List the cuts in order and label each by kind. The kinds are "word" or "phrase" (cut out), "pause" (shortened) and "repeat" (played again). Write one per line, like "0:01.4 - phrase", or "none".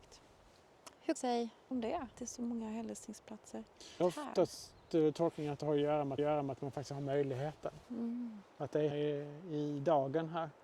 0:01.2 - phrase
0:01.7 - phrase
0:02.1 - word
0:04.0 - phrase
0:06.2 - repeat
0:07.8 - pause
0:08.9 - word